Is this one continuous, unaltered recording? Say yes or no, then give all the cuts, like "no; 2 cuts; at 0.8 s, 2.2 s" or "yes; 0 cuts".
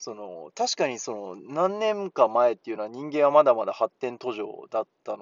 yes; 0 cuts